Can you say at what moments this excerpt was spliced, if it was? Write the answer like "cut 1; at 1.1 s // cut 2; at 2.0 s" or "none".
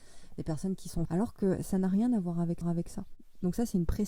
cut 1; at 1.1 s // cut 2; at 2.6 s